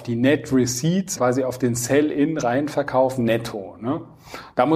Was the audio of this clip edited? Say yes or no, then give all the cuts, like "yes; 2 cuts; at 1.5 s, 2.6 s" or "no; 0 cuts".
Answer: yes; 1 cut; at 1.2 s